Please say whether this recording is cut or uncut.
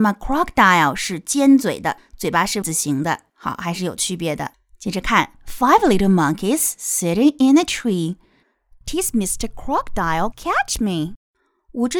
cut